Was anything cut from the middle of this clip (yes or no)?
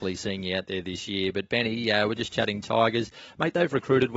no